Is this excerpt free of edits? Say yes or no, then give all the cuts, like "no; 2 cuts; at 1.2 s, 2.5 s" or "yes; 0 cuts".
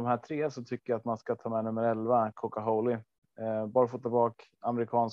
yes; 0 cuts